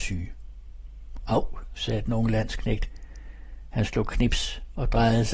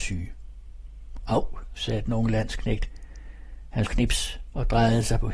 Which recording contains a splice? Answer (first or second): second